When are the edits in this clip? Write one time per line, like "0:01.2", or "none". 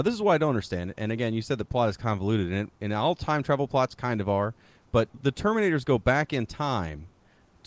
0:05.1